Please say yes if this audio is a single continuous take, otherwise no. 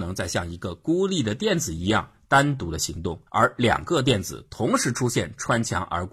no